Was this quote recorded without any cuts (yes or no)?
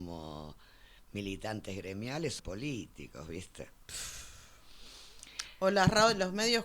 no